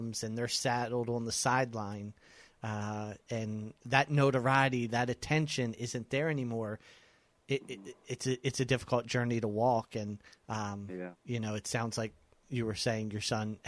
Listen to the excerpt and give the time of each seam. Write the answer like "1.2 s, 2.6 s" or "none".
11.2 s